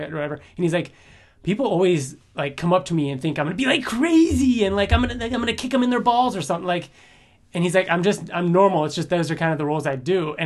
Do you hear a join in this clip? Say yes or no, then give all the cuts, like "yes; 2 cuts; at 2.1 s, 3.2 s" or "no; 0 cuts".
no; 0 cuts